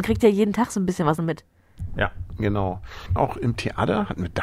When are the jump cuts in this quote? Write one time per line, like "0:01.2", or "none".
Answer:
0:01.2
0:03.2